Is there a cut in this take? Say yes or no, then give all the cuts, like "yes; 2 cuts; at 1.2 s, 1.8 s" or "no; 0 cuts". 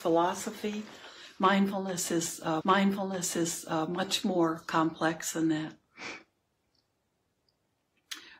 yes; 1 cut; at 2.6 s